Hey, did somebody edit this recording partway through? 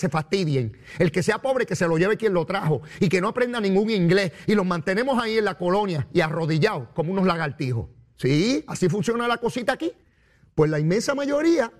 no; 0 cuts

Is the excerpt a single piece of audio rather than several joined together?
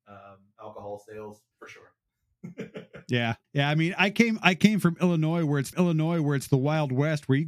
no; 3 cuts; at 1.5 s, 3.4 s, 5.7 s

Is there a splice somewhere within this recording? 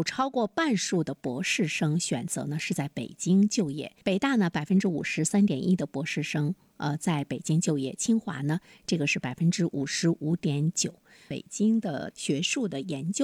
yes; 1 cut; at 4.0 s

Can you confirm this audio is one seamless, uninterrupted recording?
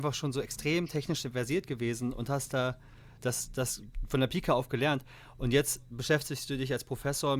yes; 0 cuts

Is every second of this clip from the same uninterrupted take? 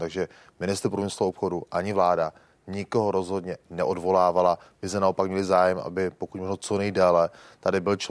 yes; 0 cuts

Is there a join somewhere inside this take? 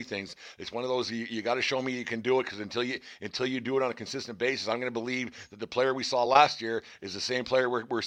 no; 0 cuts

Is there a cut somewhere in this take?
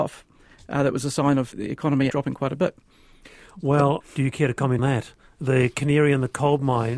yes; 4 cuts; at 1.5 s, 2.1 s, 4.0 s, 4.8 s

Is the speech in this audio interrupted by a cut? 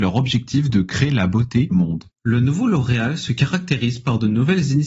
yes; 2 cuts; at 1.7 s, 2.1 s

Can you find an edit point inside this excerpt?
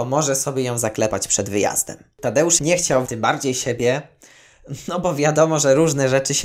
yes; 2 cuts; at 2.6 s, 3.1 s

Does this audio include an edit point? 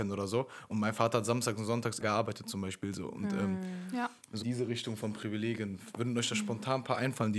yes; 2 cuts; at 2.0 s, 4.4 s

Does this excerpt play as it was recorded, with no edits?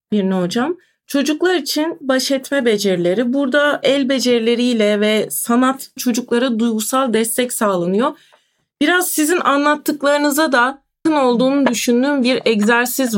no; 3 cuts; at 2.0 s, 6.0 s, 11.1 s

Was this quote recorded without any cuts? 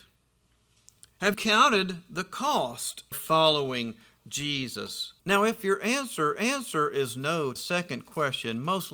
no; 5 cuts; at 1.3 s, 3.1 s, 5.2 s, 6.4 s, 7.6 s

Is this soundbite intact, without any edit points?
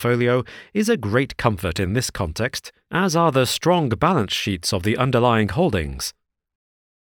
yes; 0 cuts

